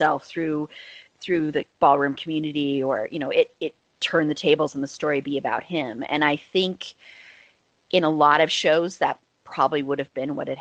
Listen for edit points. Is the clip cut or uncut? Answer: uncut